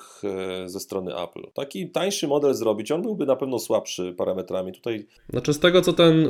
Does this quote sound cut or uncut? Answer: cut